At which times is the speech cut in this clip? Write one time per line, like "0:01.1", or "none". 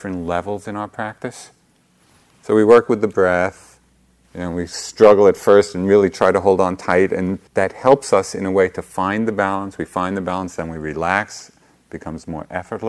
0:07.5